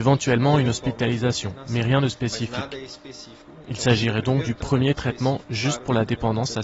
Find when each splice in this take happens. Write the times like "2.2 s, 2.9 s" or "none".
none